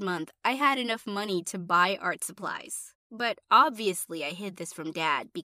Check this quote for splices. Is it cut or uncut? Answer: uncut